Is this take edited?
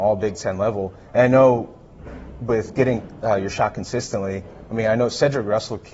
no; 0 cuts

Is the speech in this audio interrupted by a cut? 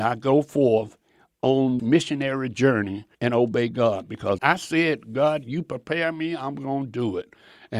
yes; 3 cuts; at 1.8 s, 3.1 s, 4.4 s

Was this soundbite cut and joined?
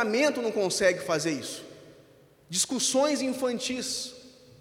no; 0 cuts

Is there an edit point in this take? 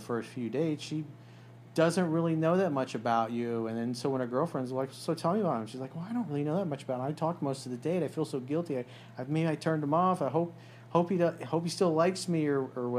no; 0 cuts

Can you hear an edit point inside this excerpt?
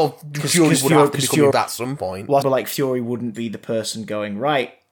yes; 2 cuts; at 1.5 s, 2.4 s

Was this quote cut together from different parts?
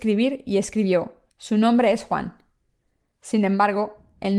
yes; 1 cut; at 1.3 s

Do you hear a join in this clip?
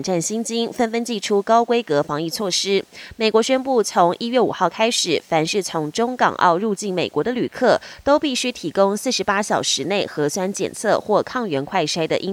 no; 0 cuts

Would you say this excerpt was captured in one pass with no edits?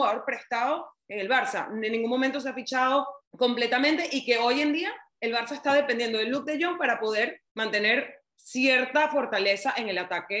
no; 2 cuts; at 3.2 s, 7.5 s

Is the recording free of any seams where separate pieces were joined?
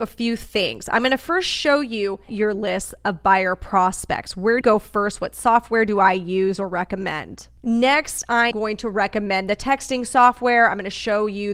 no; 3 cuts; at 2.3 s, 4.6 s, 8.5 s

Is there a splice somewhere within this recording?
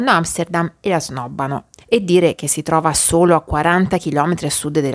no; 0 cuts

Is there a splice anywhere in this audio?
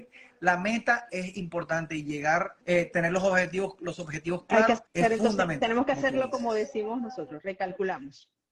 yes; 2 cuts; at 2.6 s, 4.9 s

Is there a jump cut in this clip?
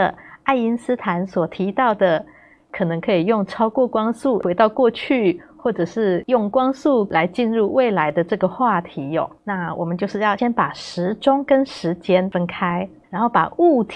yes; 2 cuts; at 9.4 s, 13.0 s

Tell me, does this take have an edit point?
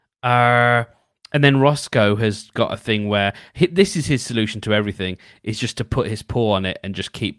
no; 0 cuts

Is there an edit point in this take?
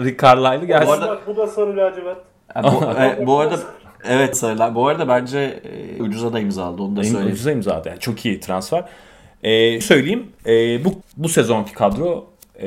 yes; 4 cuts; at 4.3 s, 6.0 s, 9.8 s, 11.0 s

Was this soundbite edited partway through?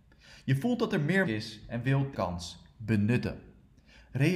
yes; 2 cuts; at 1.2 s, 2.1 s

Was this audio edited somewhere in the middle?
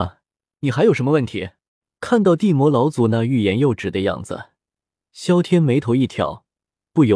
yes; 1 cut; at 1.7 s

